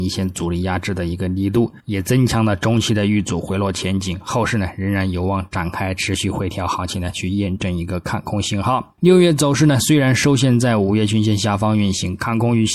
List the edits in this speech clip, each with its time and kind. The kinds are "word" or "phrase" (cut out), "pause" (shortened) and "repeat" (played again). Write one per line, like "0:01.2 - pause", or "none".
0:01.8 - pause
0:09.0 - pause